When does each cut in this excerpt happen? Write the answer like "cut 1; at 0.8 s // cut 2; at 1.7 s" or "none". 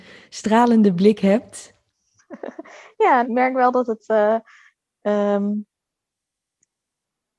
cut 1; at 3.2 s